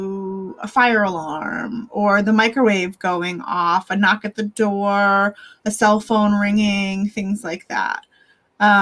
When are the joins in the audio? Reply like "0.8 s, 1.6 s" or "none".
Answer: none